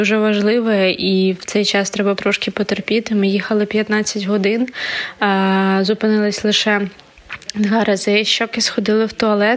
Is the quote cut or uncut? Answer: cut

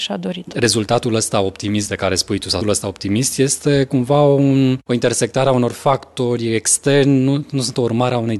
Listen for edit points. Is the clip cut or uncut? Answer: cut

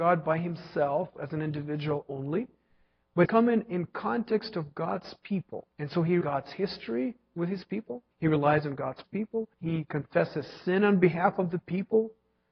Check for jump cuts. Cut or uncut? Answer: cut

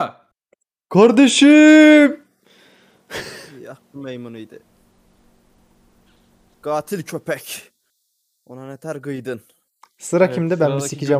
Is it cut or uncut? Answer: uncut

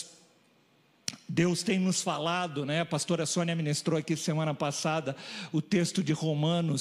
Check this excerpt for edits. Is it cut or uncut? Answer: uncut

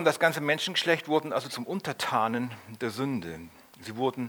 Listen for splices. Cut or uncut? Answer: uncut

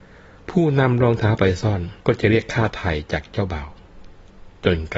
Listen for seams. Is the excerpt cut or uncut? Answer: cut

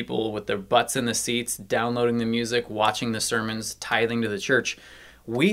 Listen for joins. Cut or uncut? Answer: uncut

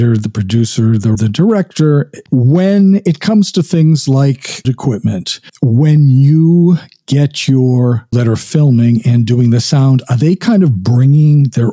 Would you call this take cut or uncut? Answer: cut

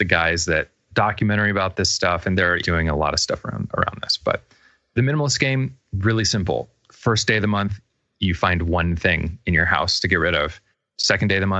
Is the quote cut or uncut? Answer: uncut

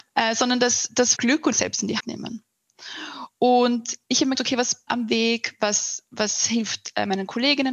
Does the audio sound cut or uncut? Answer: cut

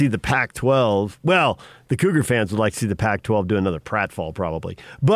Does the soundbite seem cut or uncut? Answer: uncut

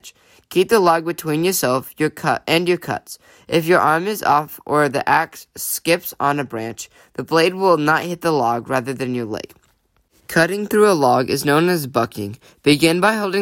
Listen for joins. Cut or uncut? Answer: uncut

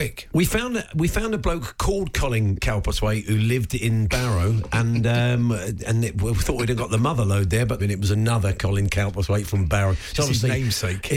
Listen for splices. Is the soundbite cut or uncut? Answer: cut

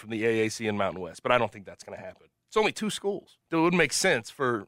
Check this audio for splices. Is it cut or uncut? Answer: cut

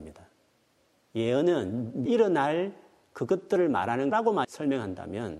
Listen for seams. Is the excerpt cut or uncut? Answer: cut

